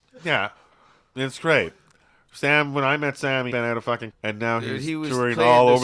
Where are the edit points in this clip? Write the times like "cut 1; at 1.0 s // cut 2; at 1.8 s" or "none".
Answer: cut 1; at 3.5 s // cut 2; at 4.1 s